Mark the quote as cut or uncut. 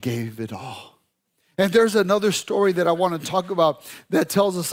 uncut